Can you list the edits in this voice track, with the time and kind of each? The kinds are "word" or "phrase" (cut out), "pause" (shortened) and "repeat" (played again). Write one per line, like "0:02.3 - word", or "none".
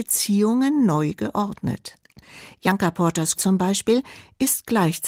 0:03.4 - word